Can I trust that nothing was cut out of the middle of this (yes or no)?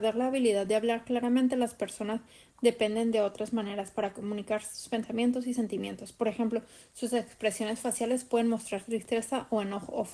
yes